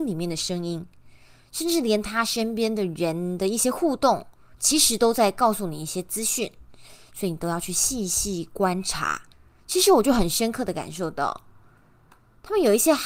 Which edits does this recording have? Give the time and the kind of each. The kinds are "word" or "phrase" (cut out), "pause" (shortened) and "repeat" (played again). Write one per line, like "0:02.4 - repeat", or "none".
0:09.3 - pause